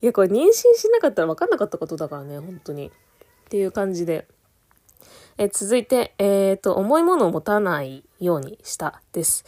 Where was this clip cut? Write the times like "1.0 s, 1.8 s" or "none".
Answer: none